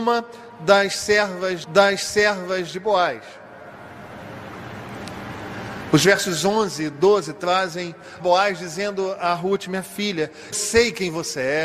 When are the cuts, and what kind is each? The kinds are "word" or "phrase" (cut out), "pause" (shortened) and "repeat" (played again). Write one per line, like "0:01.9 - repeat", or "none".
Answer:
0:01.6 - repeat
0:08.2 - phrase
0:10.5 - word